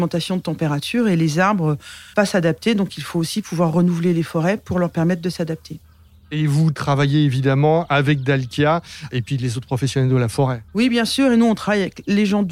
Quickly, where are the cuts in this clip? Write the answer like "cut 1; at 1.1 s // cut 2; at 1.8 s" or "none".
cut 1; at 2.1 s // cut 2; at 10.7 s